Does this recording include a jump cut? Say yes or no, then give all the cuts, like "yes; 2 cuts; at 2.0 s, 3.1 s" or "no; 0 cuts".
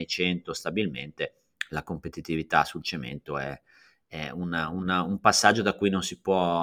no; 0 cuts